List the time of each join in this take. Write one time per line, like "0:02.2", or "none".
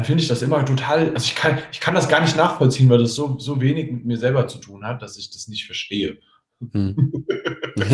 none

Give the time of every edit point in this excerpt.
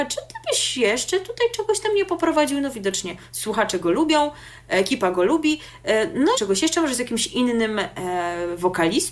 0:06.3

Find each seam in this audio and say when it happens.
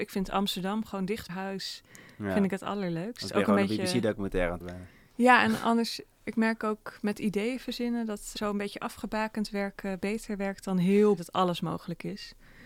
0:01.3
0:04.6
0:08.3
0:11.2

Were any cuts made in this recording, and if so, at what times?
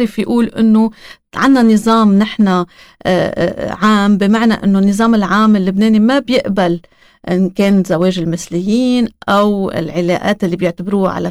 none

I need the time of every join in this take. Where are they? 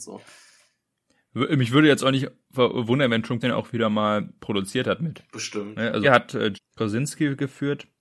0:03.4
0:06.0
0:06.5

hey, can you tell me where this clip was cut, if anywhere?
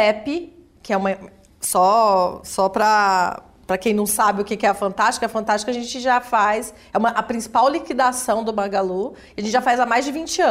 none

